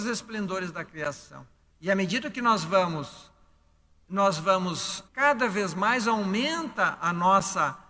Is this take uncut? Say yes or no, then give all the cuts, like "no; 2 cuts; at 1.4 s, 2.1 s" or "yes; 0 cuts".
no; 1 cut; at 5.1 s